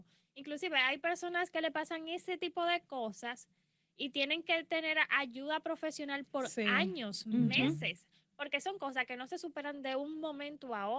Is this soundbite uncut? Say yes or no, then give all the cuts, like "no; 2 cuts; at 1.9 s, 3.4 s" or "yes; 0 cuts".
yes; 0 cuts